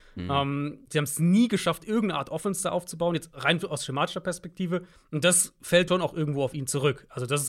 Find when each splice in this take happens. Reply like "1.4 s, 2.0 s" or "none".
4.9 s, 5.9 s